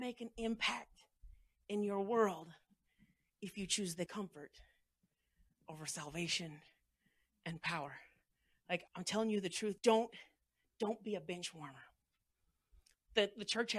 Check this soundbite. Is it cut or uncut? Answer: cut